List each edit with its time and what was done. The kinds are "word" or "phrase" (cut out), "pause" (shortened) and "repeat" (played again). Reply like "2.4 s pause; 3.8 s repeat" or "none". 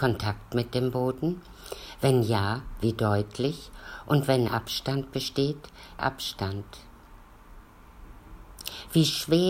4.5 s word; 6.0 s phrase